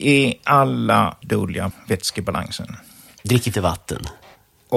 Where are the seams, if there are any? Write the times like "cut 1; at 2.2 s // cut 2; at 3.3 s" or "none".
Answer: cut 1; at 1.2 s // cut 2; at 1.7 s // cut 3; at 3.5 s